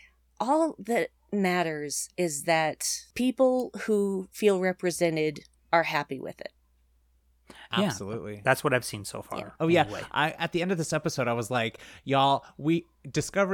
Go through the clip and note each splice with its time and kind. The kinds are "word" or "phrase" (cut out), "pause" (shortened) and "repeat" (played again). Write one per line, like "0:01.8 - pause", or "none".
none